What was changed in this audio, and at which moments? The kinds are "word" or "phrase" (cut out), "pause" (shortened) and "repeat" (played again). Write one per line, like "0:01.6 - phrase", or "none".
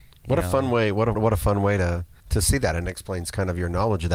0:01.1 - word
0:02.2 - pause